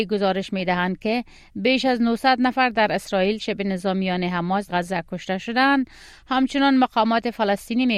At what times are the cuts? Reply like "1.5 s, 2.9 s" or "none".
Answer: 3.4 s, 4.7 s